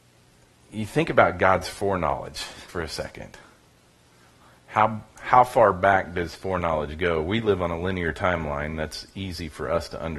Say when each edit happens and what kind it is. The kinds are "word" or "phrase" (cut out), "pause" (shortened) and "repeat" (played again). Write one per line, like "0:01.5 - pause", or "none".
0:02.7 - word
0:06.3 - word